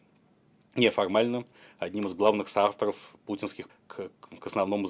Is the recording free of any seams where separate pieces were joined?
no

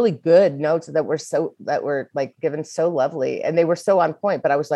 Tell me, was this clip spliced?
no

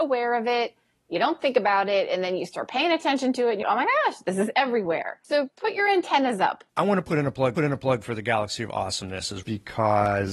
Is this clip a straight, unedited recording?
no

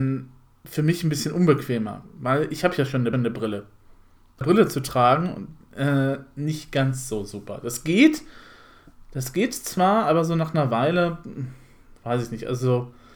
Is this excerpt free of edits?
no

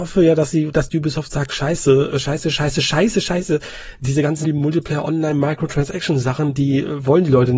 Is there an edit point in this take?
yes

